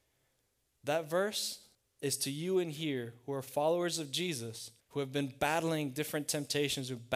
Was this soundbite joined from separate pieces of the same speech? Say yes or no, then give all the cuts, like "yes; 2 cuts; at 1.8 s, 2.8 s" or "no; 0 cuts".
yes; 2 cuts; at 1.7 s, 4.8 s